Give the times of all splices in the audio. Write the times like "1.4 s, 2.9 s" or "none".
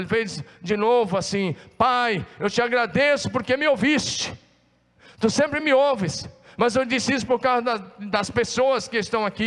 none